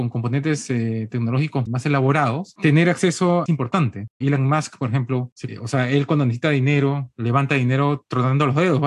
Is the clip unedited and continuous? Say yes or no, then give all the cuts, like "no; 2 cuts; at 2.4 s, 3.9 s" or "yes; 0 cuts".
no; 3 cuts; at 1.7 s, 3.5 s, 5.5 s